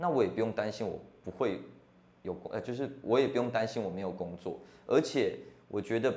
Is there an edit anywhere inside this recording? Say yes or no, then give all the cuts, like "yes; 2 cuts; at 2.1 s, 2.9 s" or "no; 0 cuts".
no; 0 cuts